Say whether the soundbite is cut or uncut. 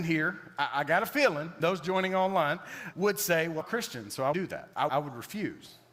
cut